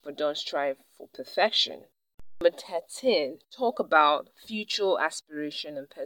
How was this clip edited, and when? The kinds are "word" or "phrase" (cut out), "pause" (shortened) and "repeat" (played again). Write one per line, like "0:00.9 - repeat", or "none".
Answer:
none